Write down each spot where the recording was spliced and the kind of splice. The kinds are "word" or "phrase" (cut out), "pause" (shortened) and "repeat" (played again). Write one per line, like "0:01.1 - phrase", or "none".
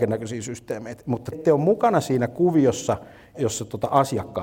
0:01.3 - word
0:03.3 - word